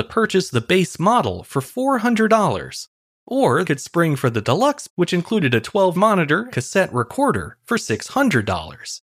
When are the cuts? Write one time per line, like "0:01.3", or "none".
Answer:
0:03.6
0:04.9
0:05.9
0:06.5